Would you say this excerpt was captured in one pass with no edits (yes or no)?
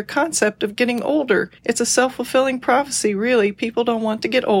no